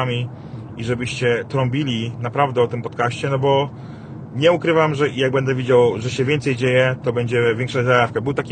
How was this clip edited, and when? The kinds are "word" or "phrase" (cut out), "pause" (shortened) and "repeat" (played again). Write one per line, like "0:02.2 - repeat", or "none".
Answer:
none